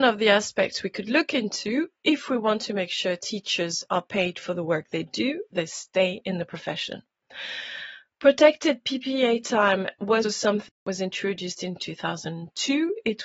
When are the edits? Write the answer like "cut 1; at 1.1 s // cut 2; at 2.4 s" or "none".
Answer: cut 1; at 5.5 s // cut 2; at 10.2 s